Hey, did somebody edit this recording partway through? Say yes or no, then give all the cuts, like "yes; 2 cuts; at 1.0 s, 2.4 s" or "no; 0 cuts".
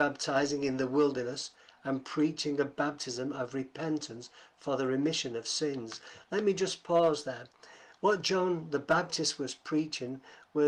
no; 0 cuts